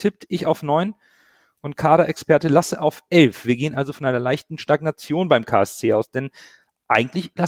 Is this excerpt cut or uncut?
uncut